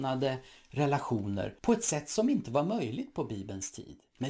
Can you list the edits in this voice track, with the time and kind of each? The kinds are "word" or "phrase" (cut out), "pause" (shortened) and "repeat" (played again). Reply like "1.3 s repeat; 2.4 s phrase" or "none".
1.6 s pause